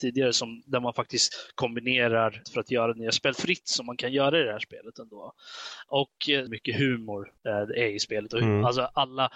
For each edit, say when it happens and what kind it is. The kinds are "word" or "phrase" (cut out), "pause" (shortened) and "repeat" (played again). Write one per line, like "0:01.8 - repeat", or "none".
0:02.4 - word
0:03.3 - word
0:06.5 - phrase
0:07.4 - pause

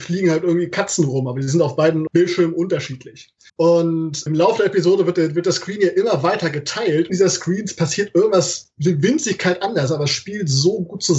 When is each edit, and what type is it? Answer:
0:03.5 - pause
0:07.1 - phrase

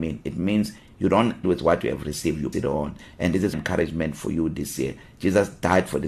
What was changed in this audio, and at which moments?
0:01.4 - word
0:02.5 - word
0:03.5 - word

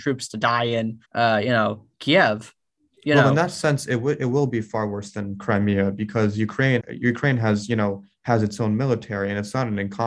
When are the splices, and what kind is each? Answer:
0:01.0 - pause
0:01.9 - pause
0:06.8 - word

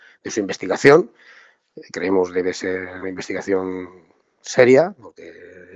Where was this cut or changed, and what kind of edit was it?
0:01.9 - word
0:03.0 - word

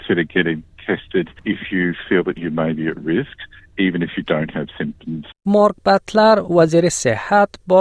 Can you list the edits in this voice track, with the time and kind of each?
0:05.3 - pause

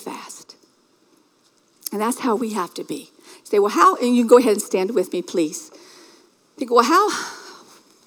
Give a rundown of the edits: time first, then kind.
none

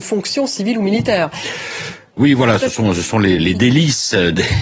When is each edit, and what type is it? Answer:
0:03.4 - word

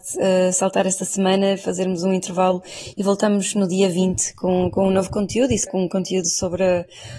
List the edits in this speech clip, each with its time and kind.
0:05.7 - word

